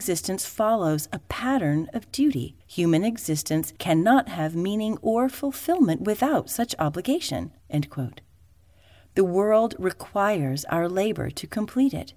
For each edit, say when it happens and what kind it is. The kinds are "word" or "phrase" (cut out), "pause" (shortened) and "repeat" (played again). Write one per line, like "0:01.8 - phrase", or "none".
0:02.6 - pause
0:03.8 - pause
0:07.6 - pause